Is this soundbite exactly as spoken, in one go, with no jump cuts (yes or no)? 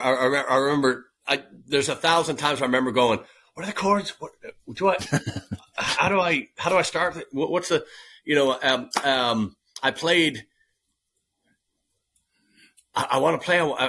yes